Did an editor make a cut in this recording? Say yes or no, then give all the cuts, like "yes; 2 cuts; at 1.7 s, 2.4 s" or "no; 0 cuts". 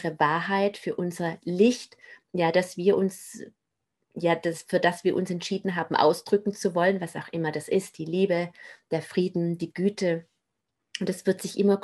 no; 0 cuts